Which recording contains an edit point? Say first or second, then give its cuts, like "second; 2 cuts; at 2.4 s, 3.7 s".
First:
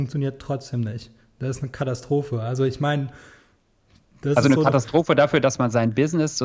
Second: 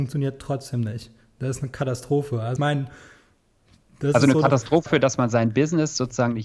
second; 2 cuts; at 2.6 s, 4.9 s